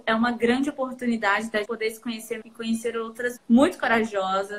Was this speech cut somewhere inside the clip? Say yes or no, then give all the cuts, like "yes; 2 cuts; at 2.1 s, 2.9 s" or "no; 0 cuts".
yes; 3 cuts; at 1.6 s, 2.4 s, 3.4 s